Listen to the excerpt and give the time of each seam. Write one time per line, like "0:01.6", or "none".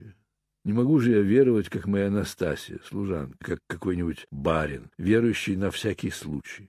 0:03.4